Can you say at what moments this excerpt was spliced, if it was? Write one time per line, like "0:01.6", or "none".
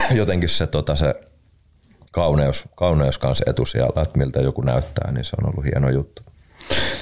none